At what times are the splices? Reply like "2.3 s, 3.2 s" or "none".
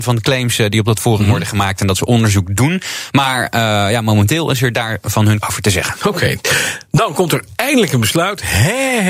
5.4 s